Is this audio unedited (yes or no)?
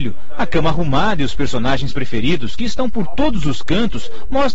yes